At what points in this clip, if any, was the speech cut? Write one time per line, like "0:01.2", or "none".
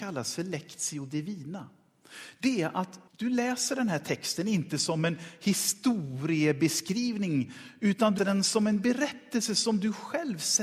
0:03.1
0:08.2